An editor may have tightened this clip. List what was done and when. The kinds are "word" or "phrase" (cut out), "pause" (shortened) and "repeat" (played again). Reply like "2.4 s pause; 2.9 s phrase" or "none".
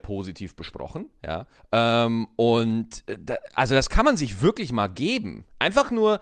1.6 s pause